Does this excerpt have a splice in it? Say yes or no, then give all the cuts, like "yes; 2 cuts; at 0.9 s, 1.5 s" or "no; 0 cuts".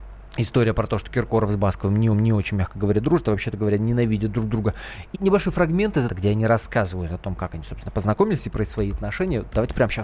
yes; 3 cuts; at 2.1 s, 5.1 s, 6.1 s